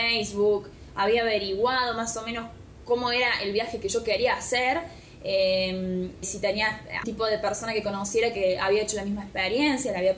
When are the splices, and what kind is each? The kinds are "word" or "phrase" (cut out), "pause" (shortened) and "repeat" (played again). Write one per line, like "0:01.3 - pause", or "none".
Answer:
0:06.2 - word
0:07.0 - word